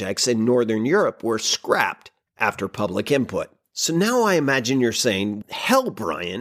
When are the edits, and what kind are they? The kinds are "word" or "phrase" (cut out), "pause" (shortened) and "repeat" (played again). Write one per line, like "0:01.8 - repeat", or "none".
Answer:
0:05.4 - word